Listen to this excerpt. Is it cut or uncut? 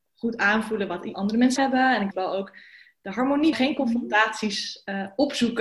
cut